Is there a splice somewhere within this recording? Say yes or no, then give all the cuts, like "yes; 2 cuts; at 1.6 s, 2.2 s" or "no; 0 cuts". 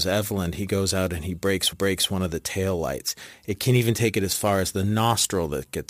yes; 1 cut; at 1.7 s